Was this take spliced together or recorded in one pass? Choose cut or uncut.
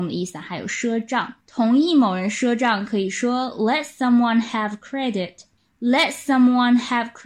cut